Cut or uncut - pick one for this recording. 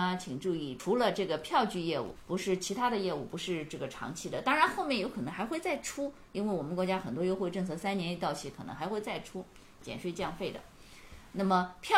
uncut